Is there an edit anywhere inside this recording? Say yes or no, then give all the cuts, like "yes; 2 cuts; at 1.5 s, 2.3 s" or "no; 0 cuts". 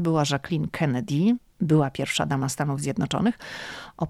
no; 0 cuts